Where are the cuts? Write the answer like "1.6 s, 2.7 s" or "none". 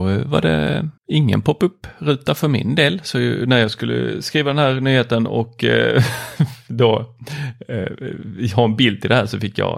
1.0 s